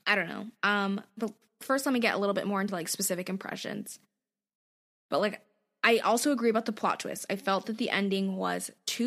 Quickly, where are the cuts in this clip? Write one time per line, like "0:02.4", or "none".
none